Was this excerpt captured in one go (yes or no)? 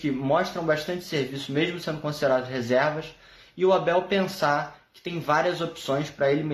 yes